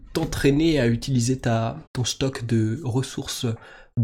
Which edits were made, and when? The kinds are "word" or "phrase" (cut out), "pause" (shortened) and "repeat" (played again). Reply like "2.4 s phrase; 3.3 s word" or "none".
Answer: 1.9 s pause